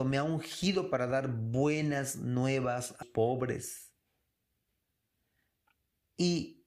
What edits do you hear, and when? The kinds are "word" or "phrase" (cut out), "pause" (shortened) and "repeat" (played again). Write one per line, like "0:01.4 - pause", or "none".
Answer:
0:03.0 - word